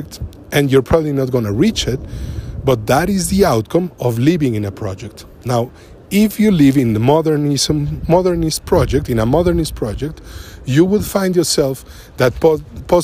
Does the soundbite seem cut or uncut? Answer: uncut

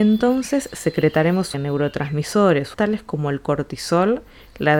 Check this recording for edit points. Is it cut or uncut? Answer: cut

